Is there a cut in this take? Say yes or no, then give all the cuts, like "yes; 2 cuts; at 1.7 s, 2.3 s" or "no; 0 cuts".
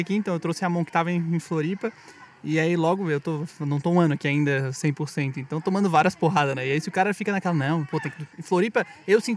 yes; 1 cut; at 8.3 s